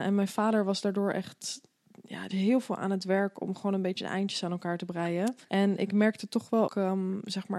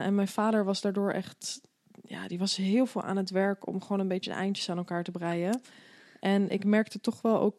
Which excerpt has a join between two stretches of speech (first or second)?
first